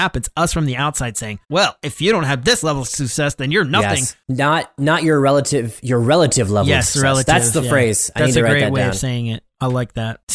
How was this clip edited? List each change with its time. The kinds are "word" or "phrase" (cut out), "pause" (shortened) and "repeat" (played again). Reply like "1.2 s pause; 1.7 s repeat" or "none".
1.4 s pause